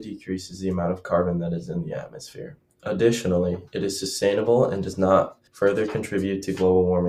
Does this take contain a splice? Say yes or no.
yes